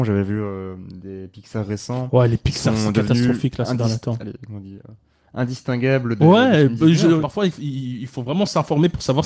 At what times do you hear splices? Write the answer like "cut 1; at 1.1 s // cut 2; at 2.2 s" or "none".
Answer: none

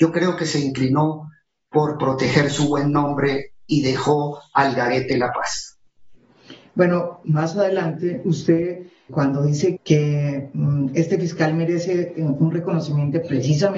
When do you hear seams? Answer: cut 1; at 7.2 s // cut 2; at 9.1 s // cut 3; at 9.8 s

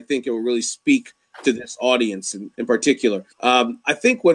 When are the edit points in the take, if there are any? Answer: cut 1; at 2.5 s // cut 2; at 3.3 s

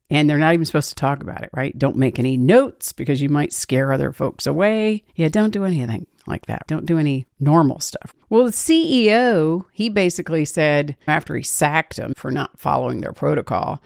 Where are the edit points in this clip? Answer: cut 1; at 5.1 s // cut 2; at 8.2 s // cut 3; at 11.0 s

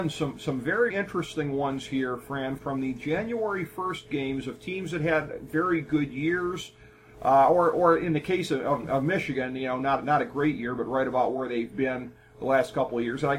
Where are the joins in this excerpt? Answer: cut 1; at 0.9 s // cut 2; at 2.6 s

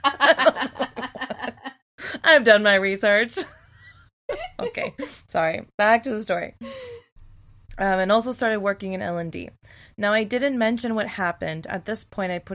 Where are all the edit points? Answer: none

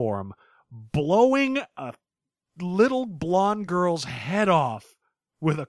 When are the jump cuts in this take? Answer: none

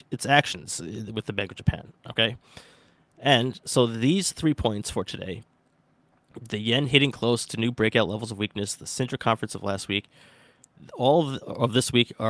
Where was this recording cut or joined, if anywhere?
none

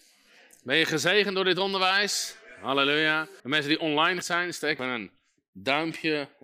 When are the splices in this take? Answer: cut 1; at 3.4 s // cut 2; at 4.2 s // cut 3; at 4.8 s

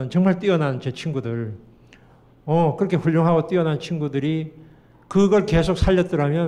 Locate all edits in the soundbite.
none

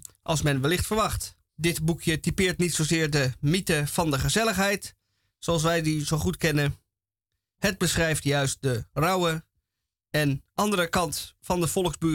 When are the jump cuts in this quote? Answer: cut 1; at 1.5 s

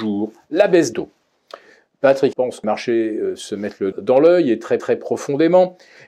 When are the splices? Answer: cut 1; at 0.9 s // cut 2; at 2.3 s // cut 3; at 2.6 s // cut 4; at 3.9 s // cut 5; at 4.8 s

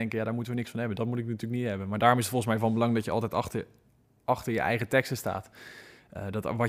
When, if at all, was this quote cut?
none

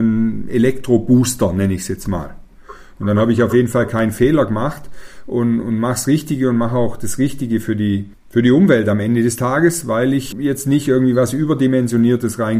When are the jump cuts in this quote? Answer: cut 1; at 5.6 s // cut 2; at 8.2 s // cut 3; at 10.3 s

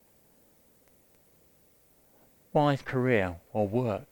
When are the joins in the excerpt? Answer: cut 1; at 2.8 s

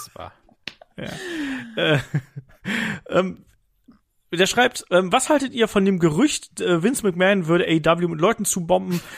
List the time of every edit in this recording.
none

